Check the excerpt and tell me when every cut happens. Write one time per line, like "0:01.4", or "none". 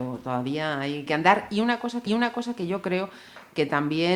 0:01.1
0:02.1